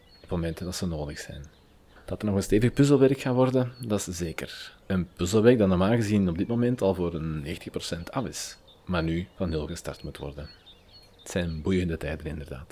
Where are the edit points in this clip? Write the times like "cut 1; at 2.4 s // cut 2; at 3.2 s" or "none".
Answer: cut 1; at 4.8 s // cut 2; at 11.0 s